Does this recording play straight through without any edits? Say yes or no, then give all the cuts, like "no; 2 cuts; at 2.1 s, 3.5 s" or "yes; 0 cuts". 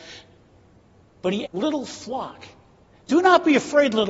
no; 1 cut; at 1.4 s